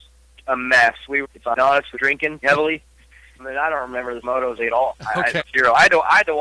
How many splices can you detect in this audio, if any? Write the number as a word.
eight